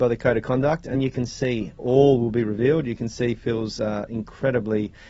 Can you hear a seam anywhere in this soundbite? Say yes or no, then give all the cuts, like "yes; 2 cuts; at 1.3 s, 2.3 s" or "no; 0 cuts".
yes; 1 cut; at 0.9 s